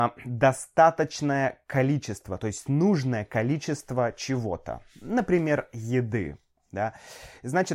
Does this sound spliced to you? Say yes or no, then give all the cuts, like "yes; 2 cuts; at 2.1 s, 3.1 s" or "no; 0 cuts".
no; 0 cuts